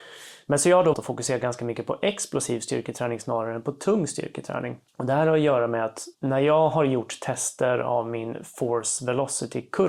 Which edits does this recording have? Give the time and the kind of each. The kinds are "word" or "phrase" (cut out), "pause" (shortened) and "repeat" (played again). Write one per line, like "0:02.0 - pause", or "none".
0:00.9 - word
0:04.9 - pause
0:06.1 - pause

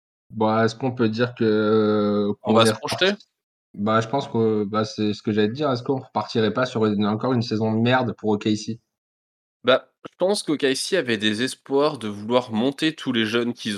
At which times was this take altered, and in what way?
none

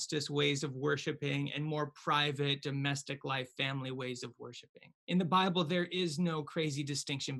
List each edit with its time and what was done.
0:05.0 - pause

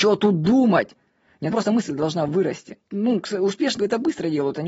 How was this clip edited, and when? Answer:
0:01.5 - word
0:02.9 - pause
0:03.8 - word

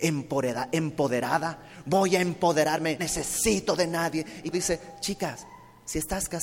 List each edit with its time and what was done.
0:03.0 - word
0:04.5 - word

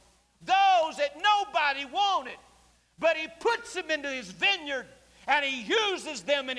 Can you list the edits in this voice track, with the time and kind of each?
none

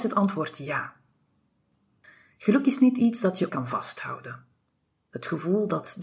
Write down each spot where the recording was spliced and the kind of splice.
0:03.5 - word

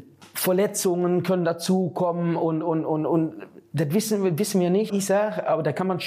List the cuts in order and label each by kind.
0:03.7 - pause
0:04.9 - word

